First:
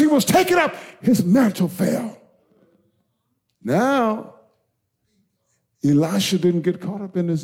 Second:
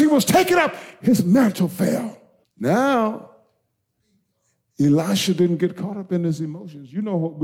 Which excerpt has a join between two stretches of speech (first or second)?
second